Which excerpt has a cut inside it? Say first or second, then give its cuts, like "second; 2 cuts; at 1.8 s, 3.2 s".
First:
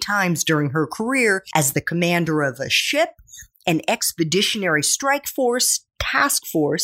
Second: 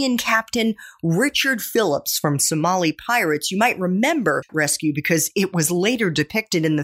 second; 1 cut; at 4.5 s